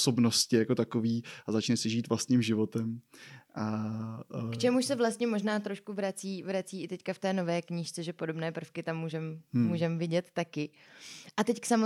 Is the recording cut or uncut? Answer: uncut